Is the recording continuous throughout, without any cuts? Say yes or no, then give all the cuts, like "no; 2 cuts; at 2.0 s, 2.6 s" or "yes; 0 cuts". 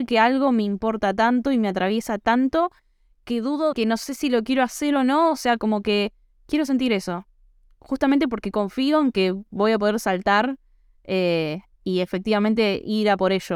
no; 2 cuts; at 3.7 s, 11.7 s